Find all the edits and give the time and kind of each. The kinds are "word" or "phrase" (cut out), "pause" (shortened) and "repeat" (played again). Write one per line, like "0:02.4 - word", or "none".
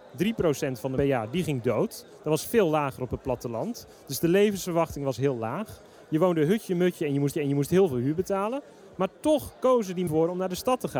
0:01.0 - phrase
0:07.3 - repeat
0:10.1 - phrase